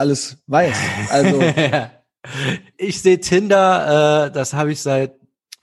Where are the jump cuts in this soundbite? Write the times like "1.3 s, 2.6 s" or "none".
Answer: 2.7 s